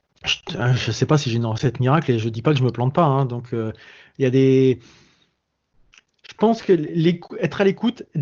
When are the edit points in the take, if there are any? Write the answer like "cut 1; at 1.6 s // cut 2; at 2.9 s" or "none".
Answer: none